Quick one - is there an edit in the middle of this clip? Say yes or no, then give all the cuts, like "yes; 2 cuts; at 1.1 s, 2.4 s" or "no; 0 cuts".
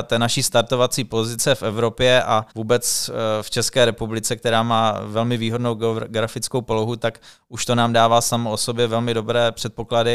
yes; 1 cut; at 2.5 s